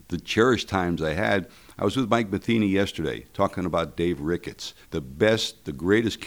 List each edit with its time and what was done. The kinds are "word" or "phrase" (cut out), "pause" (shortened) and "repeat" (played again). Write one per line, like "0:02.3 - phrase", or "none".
0:04.8 - pause

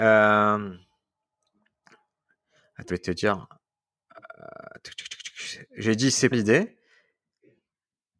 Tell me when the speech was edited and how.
0:02.9 - word
0:06.3 - word

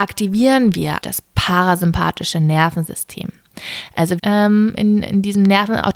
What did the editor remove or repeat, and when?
0:01.0 - word
0:04.2 - phrase

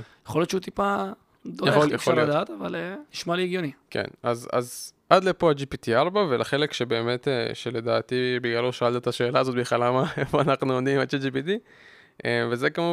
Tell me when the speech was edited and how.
0:01.9 - phrase
0:03.1 - pause

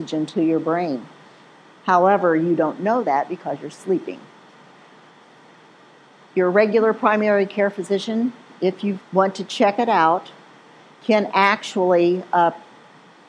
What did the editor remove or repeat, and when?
0:09.0 - pause

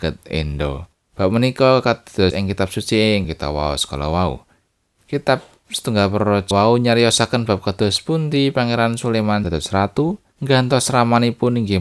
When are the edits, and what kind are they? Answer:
0:00.9 - pause
0:02.3 - word
0:03.2 - word
0:04.7 - pause
0:06.5 - word
0:09.4 - word
0:10.3 - pause

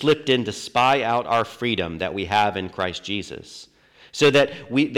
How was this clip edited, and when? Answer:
none

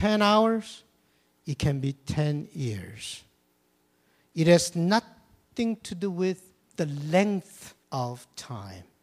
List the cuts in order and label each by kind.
0:07.8 - pause

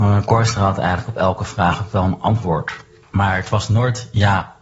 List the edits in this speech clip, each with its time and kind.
none

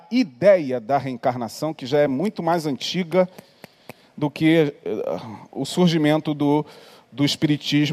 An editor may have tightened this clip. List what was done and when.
none

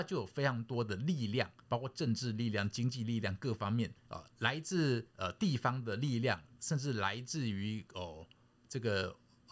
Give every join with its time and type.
0:01.6 - pause
0:04.0 - pause
0:05.1 - pause

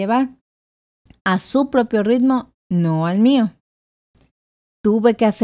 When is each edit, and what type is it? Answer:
none

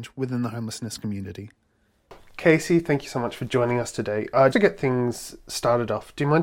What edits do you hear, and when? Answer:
0:04.5 - word

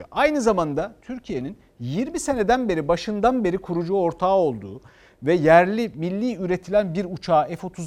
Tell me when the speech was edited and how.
none

